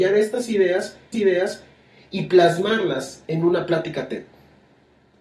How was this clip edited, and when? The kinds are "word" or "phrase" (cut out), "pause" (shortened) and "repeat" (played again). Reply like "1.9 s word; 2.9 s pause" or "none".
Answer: 1.1 s repeat

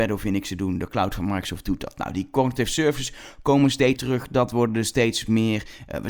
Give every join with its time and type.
4.0 s word

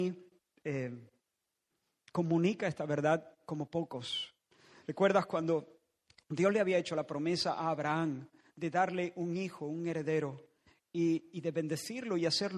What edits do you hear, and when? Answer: none

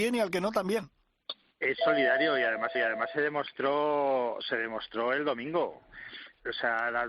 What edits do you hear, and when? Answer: 1.4 s pause; 2.7 s repeat

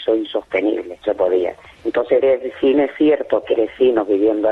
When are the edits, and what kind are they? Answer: 1.0 s word; 2.2 s word; 2.7 s word; 3.5 s word

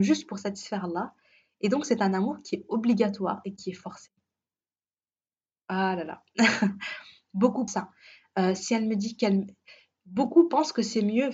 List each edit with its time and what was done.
7.7 s word

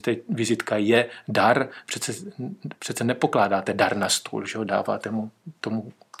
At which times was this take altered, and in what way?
none

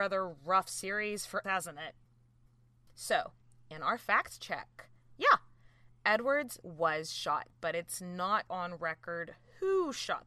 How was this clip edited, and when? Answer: 1.4 s word; 6.6 s word; 7.5 s word; 8.5 s word

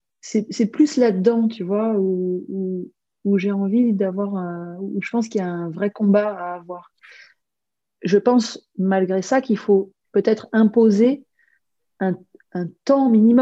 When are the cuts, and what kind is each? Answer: none

